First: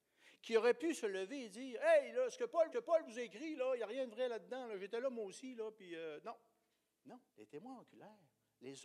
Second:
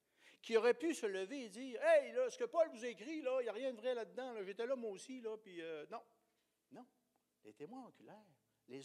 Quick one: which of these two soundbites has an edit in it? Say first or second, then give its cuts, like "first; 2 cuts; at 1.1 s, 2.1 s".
first; 2 cuts; at 2.7 s, 7.3 s